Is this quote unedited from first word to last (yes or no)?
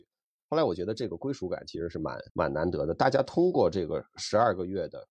no